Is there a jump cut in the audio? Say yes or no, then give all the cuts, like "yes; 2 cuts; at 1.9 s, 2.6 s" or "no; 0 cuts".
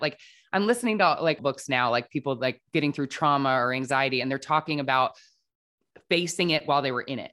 yes; 2 cuts; at 1.4 s, 2.7 s